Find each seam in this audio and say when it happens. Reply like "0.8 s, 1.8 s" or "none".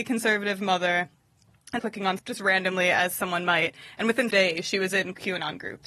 1.8 s, 2.2 s, 4.3 s